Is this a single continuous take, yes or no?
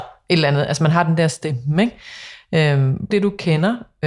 no